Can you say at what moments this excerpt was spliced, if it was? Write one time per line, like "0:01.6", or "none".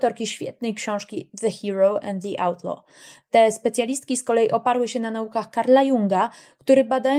none